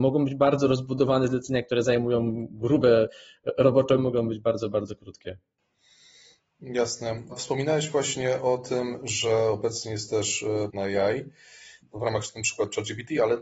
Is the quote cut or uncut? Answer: cut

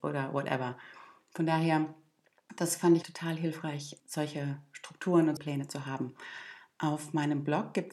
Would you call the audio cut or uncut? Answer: cut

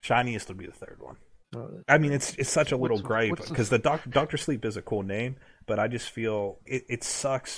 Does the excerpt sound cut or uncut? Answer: cut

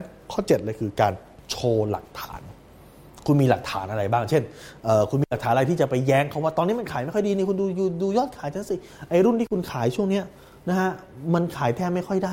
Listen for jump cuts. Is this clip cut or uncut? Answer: uncut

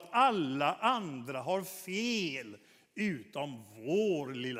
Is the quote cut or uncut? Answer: uncut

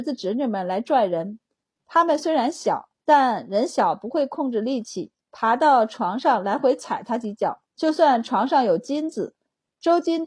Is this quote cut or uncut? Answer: cut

